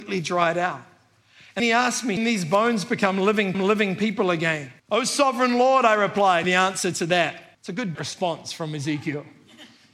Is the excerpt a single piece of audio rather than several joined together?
no; 7 cuts; at 1.6 s, 2.2 s, 3.5 s, 4.8 s, 6.4 s, 7.5 s, 7.9 s

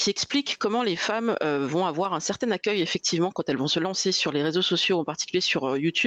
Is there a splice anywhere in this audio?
no; 0 cuts

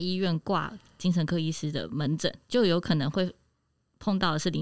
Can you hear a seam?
no; 0 cuts

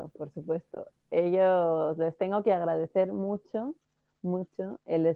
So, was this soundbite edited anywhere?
no; 0 cuts

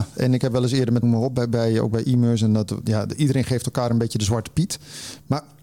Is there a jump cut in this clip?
yes; 1 cut; at 1.0 s

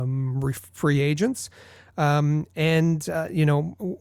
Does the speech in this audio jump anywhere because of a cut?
no; 0 cuts

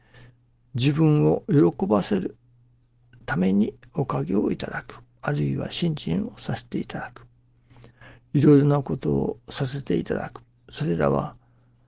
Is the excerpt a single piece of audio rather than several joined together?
no; 1 cut; at 10.5 s

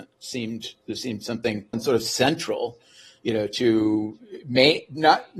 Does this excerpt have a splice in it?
yes; 1 cut; at 1.7 s

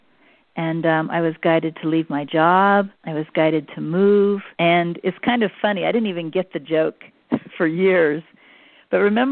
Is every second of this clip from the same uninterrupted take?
no; 2 cuts; at 2.9 s, 4.5 s

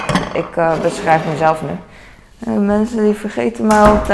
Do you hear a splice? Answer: no; 0 cuts

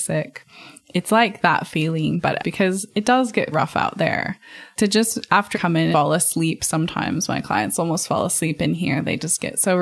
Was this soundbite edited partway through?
yes; 5 cuts; at 2.4 s, 3.5 s, 4.8 s, 5.5 s, 5.9 s

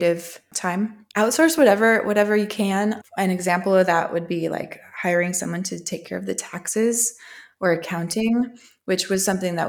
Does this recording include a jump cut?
no; 0 cuts

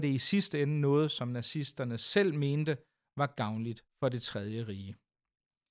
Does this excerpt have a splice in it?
no; 0 cuts

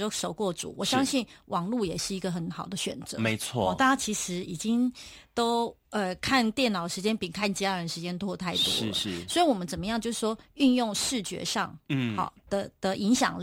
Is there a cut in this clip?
yes; 1 cut; at 5.8 s

